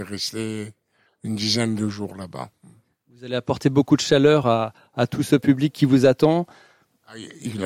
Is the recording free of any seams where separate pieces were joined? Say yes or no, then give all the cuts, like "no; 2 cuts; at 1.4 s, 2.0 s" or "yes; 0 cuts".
yes; 0 cuts